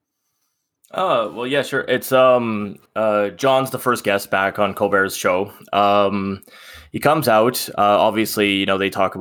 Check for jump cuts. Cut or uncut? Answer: cut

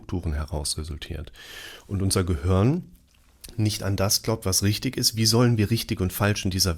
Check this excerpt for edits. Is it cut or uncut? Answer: uncut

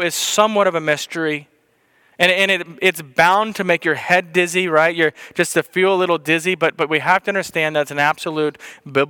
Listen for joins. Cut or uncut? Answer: uncut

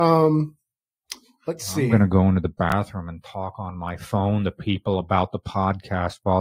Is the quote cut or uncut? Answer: uncut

